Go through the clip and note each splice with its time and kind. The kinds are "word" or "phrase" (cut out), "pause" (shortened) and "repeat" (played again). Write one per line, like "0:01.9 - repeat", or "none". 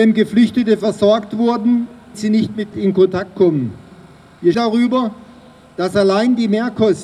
0:02.1 - word
0:02.7 - word
0:04.5 - word